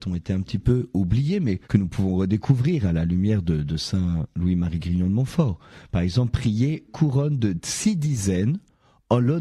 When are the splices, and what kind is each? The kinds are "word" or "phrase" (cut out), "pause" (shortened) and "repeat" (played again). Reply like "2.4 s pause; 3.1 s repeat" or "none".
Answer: 1.6 s pause; 6.9 s word

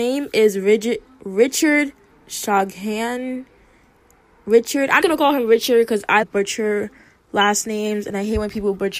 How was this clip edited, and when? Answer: 2.1 s word; 5.0 s word; 6.2 s word

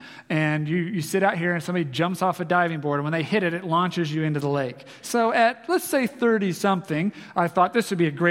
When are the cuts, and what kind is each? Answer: none

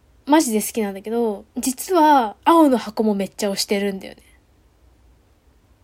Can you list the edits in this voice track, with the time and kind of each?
1.5 s pause; 2.4 s pause

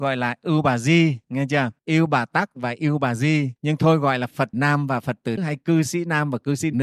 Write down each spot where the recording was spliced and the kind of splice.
1.2 s pause; 1.8 s pause; 3.6 s pause; 4.5 s word; 5.4 s word

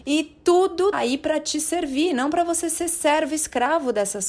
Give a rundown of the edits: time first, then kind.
0.9 s word

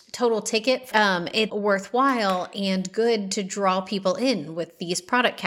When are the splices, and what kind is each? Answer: 0.9 s phrase; 1.5 s word

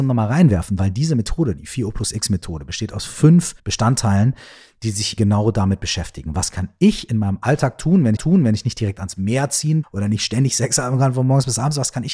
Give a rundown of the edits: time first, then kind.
3.6 s pause; 5.2 s word; 8.2 s repeat; 9.8 s word

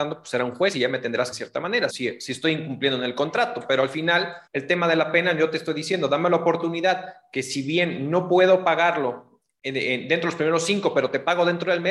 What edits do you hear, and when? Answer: 1.3 s phrase; 1.9 s word; 4.5 s pause

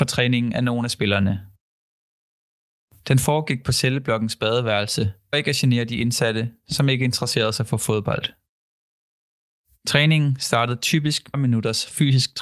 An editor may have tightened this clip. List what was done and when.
5.3 s word; 11.3 s word

